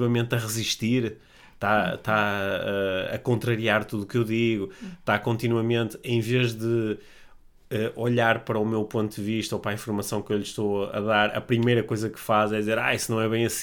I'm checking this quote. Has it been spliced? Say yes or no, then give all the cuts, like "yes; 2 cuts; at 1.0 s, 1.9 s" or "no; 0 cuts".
no; 0 cuts